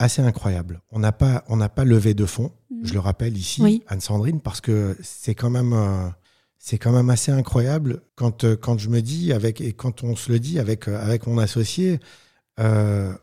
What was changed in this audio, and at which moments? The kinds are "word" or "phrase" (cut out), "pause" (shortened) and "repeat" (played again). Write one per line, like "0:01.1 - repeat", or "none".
0:06.2 - pause
0:08.1 - pause